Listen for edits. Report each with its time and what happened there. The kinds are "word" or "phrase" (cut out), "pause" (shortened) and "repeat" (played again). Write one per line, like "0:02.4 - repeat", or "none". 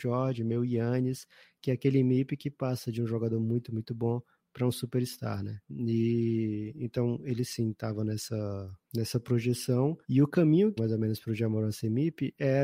0:05.6 - pause
0:08.8 - pause
0:10.0 - pause
0:10.8 - phrase